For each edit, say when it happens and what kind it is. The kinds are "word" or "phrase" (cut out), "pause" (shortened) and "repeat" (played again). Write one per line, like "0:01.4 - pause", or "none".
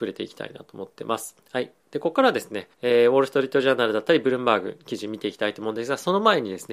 0:01.4 - pause
0:02.7 - pause